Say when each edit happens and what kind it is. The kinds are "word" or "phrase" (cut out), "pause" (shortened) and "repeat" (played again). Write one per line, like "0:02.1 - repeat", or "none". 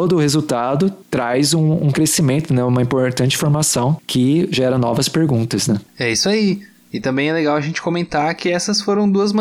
0:01.0 - pause
0:05.9 - pause